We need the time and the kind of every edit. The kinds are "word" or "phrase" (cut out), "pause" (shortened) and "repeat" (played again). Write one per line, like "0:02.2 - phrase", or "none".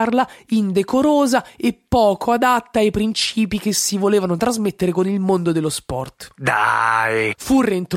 none